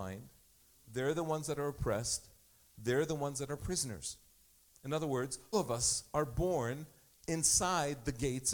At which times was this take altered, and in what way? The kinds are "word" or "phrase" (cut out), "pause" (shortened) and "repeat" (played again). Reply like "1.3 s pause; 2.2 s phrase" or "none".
5.5 s word